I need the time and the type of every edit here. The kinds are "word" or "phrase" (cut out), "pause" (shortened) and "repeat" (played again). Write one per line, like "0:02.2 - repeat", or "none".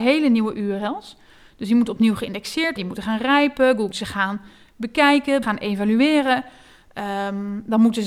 0:02.8 - word
0:03.9 - word
0:05.4 - word